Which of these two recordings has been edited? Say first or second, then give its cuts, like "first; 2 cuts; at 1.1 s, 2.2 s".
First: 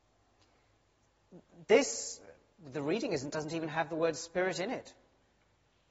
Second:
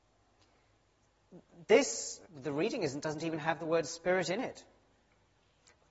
second; 1 cut; at 2.3 s